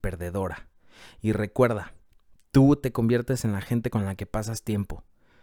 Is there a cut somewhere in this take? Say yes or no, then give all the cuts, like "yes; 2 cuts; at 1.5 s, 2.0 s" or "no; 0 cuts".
no; 0 cuts